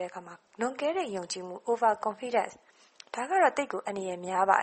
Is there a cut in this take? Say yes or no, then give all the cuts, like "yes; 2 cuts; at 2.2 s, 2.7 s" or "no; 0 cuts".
no; 0 cuts